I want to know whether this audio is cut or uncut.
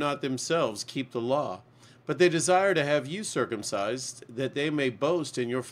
uncut